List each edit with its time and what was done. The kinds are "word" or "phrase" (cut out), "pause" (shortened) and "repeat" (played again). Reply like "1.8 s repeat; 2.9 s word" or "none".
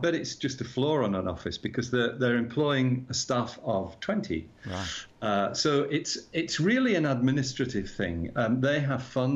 none